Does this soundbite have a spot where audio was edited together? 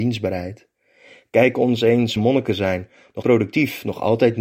yes; 2 cuts; at 2.2 s, 3.2 s

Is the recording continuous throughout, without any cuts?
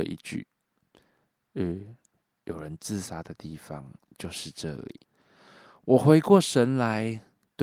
no; 1 cut; at 5.0 s

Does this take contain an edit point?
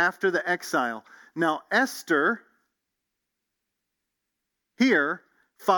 no; 0 cuts

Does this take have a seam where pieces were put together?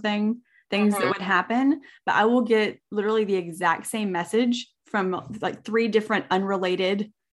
no; 0 cuts

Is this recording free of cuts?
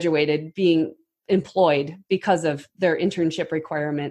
yes; 0 cuts

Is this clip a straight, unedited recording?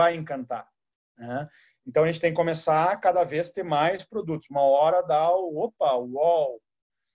yes; 0 cuts

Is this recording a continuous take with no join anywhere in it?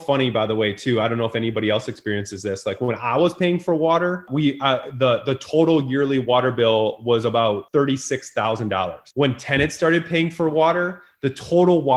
yes; 0 cuts

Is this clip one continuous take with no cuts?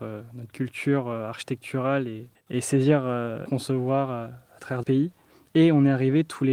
no; 3 cuts; at 2.3 s, 3.5 s, 4.8 s

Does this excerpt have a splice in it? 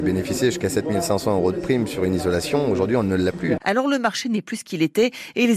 no; 0 cuts

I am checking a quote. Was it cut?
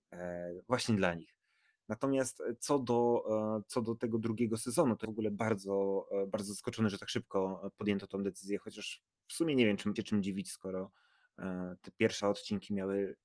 yes; 3 cuts; at 5.0 s, 10.0 s, 12.2 s

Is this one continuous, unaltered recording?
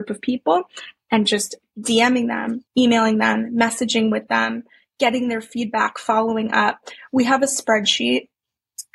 no; 1 cut; at 2.7 s

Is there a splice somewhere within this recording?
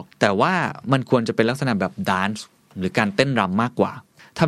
no; 0 cuts

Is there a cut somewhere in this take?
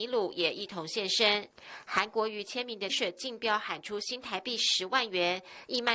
yes; 1 cut; at 2.9 s

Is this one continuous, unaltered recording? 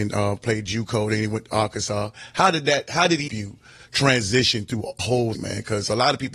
no; 3 cuts; at 3.3 s, 5.0 s, 5.3 s

